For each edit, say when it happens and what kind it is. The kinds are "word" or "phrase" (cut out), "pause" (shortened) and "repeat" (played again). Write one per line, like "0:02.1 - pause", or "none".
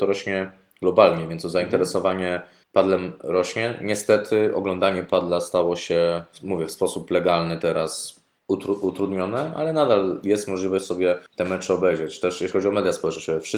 0:02.6 - pause
0:08.4 - pause
0:11.3 - pause